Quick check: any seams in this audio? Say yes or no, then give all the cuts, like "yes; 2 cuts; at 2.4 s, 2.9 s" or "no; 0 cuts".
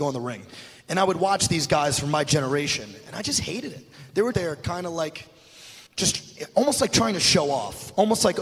yes; 2 cuts; at 4.3 s, 5.9 s